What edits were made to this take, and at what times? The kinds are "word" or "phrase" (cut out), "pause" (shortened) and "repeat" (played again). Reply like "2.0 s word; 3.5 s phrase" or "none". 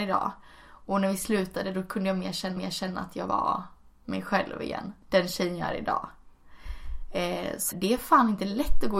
2.6 s repeat; 3.3 s word; 5.0 s pause; 7.7 s word